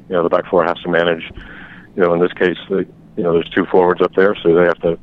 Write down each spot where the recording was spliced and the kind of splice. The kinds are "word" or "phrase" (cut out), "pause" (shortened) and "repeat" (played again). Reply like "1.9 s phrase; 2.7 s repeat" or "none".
none